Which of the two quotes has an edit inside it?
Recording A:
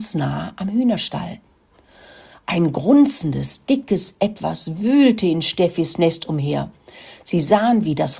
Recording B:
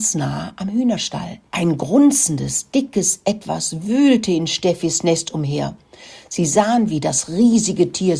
B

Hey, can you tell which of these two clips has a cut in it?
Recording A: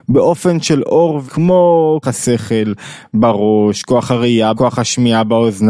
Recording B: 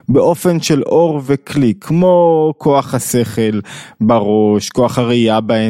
A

